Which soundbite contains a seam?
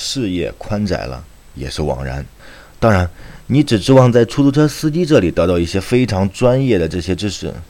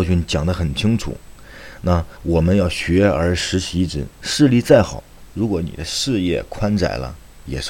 second; 1 cut; at 2.1 s

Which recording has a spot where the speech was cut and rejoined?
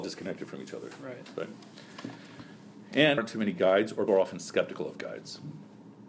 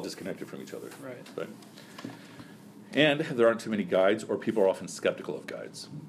first; 2 cuts; at 3.2 s, 4.1 s

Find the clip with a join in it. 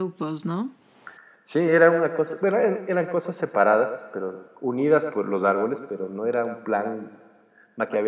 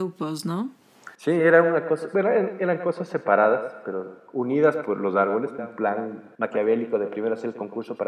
second; 3 cuts; at 1.1 s, 5.6 s, 6.3 s

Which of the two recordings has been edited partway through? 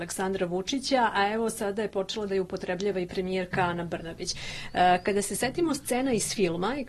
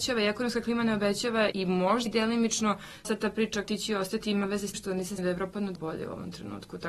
second; 7 cuts; at 1.5 s, 2.1 s, 3.0 s, 3.6 s, 4.7 s, 5.2 s, 5.7 s

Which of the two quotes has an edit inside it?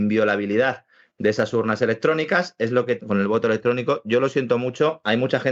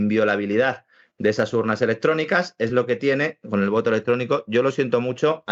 first; 1 cut; at 3.0 s

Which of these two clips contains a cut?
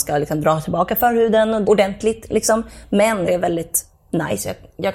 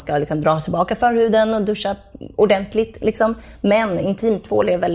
first; 2 cuts; at 1.6 s, 3.3 s

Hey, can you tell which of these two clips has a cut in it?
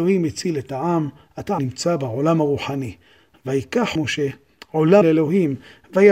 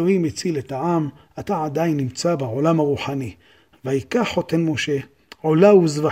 first; 3 cuts; at 1.6 s, 4.0 s, 5.0 s

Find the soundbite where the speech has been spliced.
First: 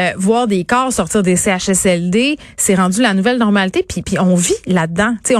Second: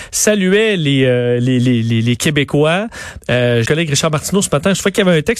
second; 1 cut; at 3.6 s

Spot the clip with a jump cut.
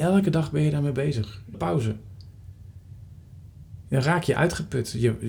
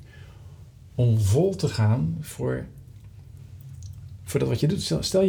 first; 1 cut; at 1.5 s

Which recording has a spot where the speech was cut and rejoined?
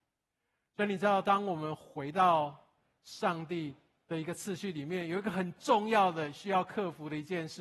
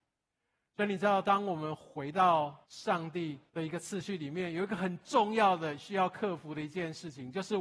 second; 2 cuts; at 2.6 s, 3.5 s

